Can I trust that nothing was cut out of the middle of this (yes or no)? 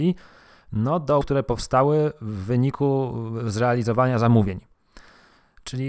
no